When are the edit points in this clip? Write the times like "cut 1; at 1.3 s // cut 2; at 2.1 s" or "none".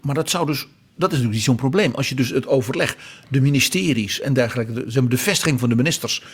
cut 1; at 4.2 s